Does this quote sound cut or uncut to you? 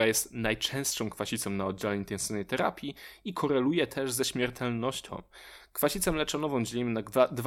uncut